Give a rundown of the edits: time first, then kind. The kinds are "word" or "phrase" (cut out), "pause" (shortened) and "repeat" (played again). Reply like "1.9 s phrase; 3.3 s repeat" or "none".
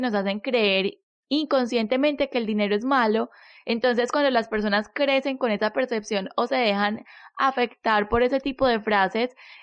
none